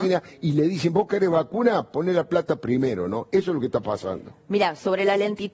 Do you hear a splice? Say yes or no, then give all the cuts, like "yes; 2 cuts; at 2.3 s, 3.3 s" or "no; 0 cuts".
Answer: no; 0 cuts